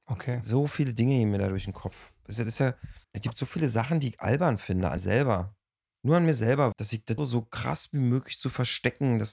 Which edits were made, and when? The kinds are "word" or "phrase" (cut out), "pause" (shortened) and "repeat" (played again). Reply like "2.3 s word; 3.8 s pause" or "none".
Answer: 3.0 s word; 5.0 s word; 6.7 s word; 7.2 s word